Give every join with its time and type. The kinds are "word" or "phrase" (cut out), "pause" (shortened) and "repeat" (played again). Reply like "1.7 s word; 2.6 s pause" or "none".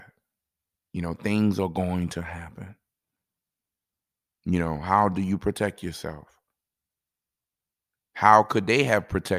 none